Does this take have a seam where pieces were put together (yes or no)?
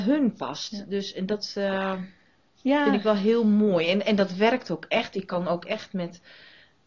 no